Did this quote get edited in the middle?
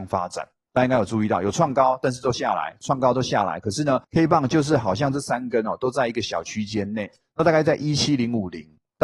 yes; 1 cut; at 4.0 s

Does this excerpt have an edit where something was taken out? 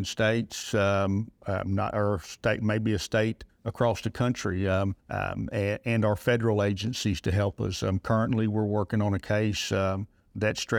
yes; 1 cut; at 5.0 s

